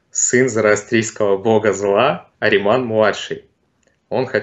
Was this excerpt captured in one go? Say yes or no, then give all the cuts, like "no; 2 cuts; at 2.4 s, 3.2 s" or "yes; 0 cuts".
no; 1 cut; at 2.3 s